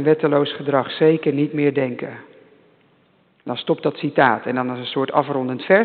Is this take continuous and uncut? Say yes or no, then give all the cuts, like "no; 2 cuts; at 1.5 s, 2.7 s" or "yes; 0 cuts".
yes; 0 cuts